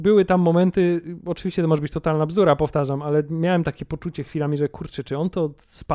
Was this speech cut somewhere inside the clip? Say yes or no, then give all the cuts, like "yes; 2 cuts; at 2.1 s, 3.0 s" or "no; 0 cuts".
no; 0 cuts